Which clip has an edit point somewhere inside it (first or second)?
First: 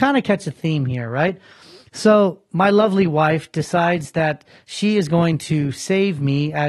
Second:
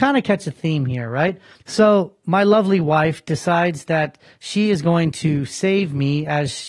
second